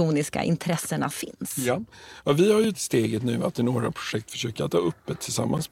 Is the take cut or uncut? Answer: cut